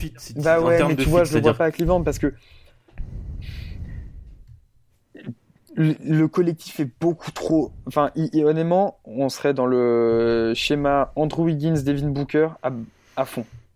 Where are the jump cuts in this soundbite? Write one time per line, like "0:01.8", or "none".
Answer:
none